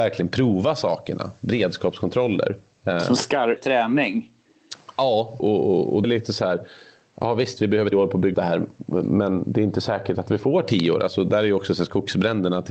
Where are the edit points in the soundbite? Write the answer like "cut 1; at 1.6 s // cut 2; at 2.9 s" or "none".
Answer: cut 1; at 3.6 s // cut 2; at 5.4 s // cut 3; at 6.0 s // cut 4; at 7.9 s // cut 5; at 8.3 s